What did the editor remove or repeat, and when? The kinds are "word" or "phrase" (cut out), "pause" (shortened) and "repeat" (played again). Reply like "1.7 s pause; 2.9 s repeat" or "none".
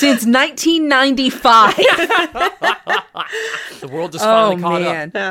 3.8 s word